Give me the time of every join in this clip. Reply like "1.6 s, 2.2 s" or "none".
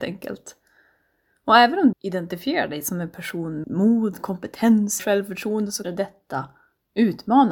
1.9 s, 3.6 s, 5.0 s, 5.8 s